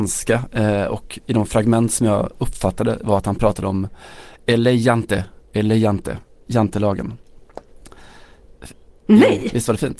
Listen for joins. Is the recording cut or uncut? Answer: uncut